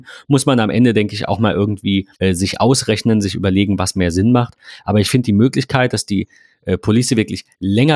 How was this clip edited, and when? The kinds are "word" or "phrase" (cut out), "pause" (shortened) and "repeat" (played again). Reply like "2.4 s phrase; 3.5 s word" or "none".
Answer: 2.1 s pause